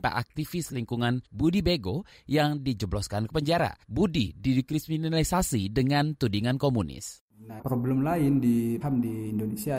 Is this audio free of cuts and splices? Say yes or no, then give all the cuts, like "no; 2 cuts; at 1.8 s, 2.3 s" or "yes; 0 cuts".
no; 4 cuts; at 1.2 s, 3.8 s, 7.6 s, 8.8 s